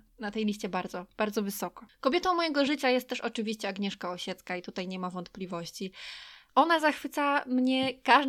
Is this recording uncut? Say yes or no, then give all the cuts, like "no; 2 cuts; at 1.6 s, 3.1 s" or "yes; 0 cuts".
yes; 0 cuts